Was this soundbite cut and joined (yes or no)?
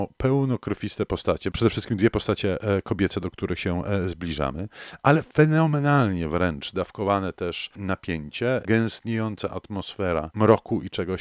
no